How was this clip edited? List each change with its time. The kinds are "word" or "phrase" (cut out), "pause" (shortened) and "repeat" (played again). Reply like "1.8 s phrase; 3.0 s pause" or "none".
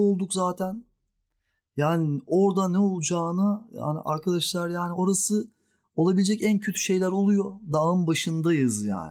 4.9 s word